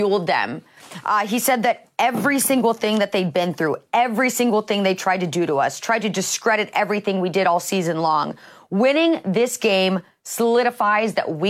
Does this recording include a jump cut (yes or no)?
no